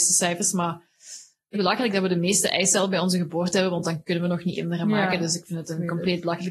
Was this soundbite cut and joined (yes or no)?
yes